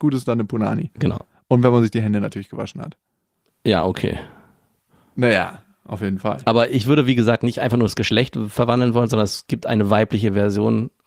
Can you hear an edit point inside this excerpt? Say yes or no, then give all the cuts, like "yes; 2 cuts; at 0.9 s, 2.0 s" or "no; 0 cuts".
no; 0 cuts